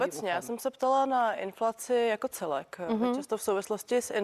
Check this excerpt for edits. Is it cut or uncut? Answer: uncut